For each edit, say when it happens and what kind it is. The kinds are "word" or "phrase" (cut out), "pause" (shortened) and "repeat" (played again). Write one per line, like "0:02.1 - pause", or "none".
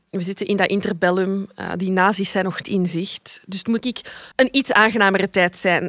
0:02.6 - word
0:03.8 - word
0:04.3 - pause